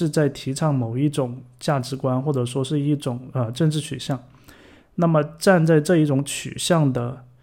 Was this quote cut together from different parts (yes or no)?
no